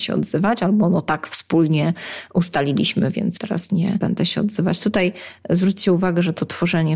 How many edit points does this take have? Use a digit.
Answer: 1